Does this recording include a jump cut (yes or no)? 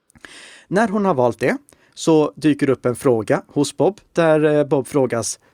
no